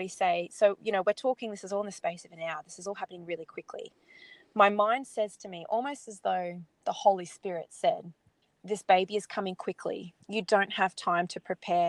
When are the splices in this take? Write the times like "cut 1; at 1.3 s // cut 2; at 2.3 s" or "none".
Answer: cut 1; at 8.4 s // cut 2; at 10.2 s